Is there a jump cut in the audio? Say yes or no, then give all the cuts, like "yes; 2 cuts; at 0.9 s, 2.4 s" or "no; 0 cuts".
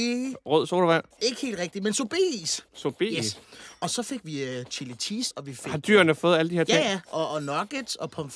yes; 2 cuts; at 1.1 s, 5.3 s